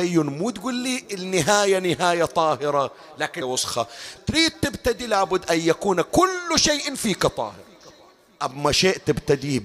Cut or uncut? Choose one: cut